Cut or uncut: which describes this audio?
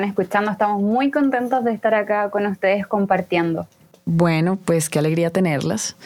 uncut